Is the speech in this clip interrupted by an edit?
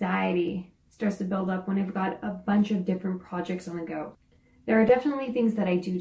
no; 0 cuts

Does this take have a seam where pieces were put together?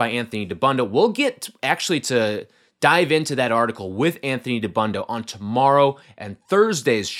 no; 0 cuts

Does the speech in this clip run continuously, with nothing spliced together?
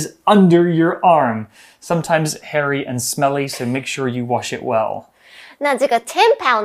yes; 0 cuts

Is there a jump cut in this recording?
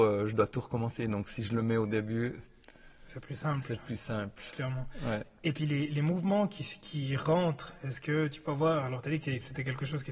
no; 0 cuts

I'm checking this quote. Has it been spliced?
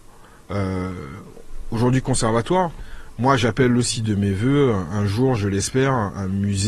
no; 0 cuts

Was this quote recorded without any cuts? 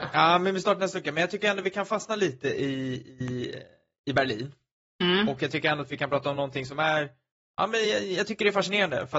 yes; 0 cuts

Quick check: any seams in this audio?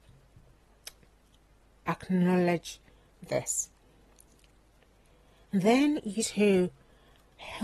yes; 1 cut; at 6.2 s

